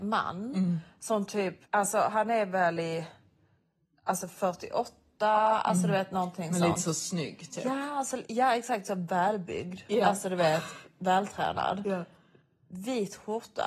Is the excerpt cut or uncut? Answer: cut